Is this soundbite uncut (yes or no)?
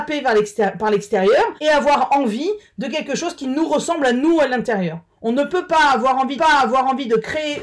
no